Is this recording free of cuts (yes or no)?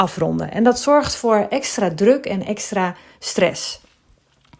yes